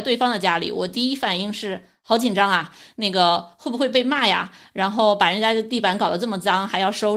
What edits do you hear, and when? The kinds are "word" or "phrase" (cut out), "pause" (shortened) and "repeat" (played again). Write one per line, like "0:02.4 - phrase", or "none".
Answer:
none